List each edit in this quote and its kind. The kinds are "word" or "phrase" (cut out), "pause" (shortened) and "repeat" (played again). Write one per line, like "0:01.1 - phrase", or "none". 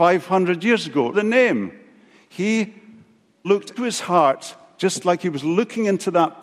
0:01.1 - word
0:03.4 - word
0:03.8 - word